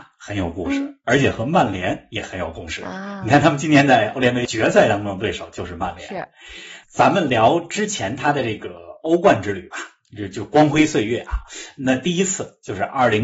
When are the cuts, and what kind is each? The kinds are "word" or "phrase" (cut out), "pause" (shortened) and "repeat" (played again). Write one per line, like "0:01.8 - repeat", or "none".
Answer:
0:06.8 - word